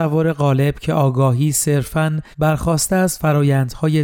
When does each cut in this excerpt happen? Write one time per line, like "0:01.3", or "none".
0:02.3